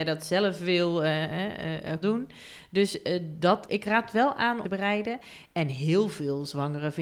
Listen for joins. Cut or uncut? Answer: cut